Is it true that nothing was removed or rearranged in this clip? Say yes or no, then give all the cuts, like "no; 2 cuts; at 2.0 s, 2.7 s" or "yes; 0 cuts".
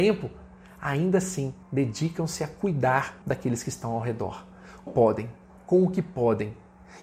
no; 3 cuts; at 1.6 s, 3.2 s, 4.9 s